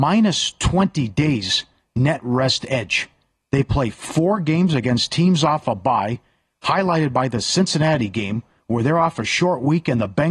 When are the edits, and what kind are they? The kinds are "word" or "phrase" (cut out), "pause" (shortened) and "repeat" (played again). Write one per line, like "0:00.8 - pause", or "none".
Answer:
none